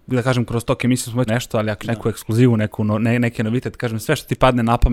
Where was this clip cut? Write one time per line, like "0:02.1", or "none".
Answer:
0:01.3
0:01.8

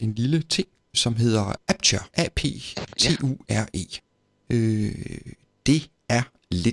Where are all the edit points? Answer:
0:00.9
0:02.1
0:04.1

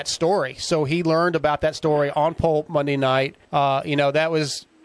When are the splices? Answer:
0:03.4

